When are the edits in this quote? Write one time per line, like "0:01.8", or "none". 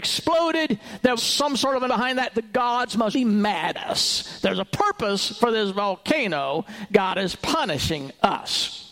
0:01.2
0:01.9
0:03.1
0:03.7